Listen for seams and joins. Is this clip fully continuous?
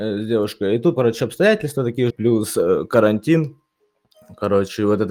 no; 2 cuts; at 1.0 s, 2.1 s

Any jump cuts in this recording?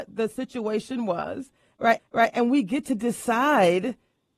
yes; 1 cut; at 2.0 s

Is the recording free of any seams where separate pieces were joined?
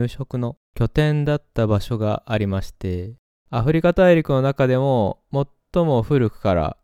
yes; 0 cuts

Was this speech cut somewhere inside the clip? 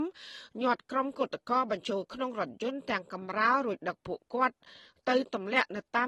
no; 0 cuts

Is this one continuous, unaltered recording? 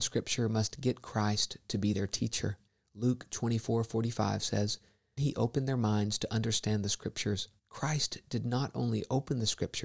no; 3 cuts; at 2.7 s, 5.2 s, 7.6 s

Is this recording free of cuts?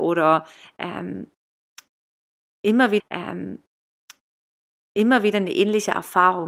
no; 1 cut; at 3.0 s

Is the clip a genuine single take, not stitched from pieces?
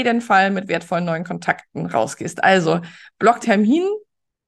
no; 1 cut; at 3.4 s

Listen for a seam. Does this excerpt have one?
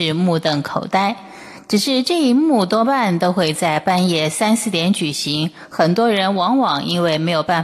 no; 0 cuts

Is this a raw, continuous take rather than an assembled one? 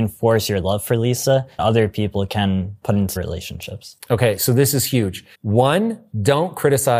no; 3 cuts; at 1.6 s, 3.2 s, 5.3 s

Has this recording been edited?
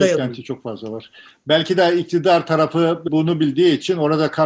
no; 0 cuts

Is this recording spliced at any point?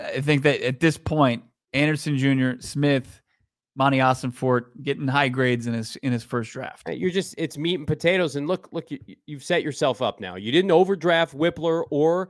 no; 0 cuts

